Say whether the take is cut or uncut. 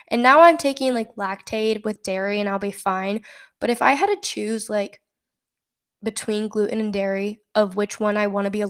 uncut